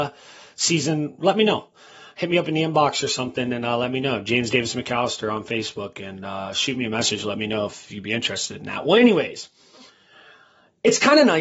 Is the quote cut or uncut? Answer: uncut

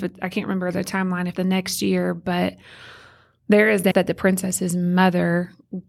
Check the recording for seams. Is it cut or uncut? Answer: cut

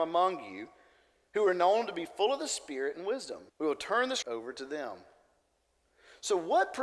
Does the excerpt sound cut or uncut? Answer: cut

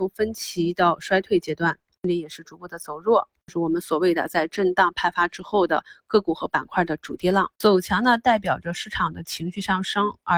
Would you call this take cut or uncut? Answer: cut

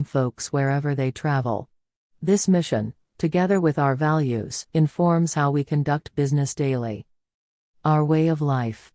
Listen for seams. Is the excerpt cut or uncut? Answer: cut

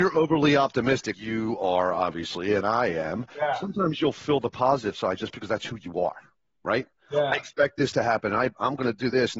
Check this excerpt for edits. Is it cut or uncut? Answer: cut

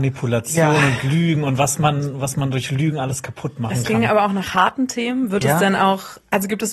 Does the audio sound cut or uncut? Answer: uncut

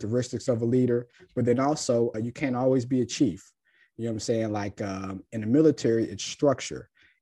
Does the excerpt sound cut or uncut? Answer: cut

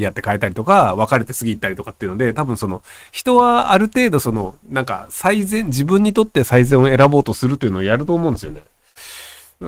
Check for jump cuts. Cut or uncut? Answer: cut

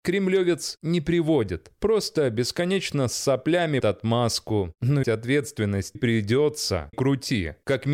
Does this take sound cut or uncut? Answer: cut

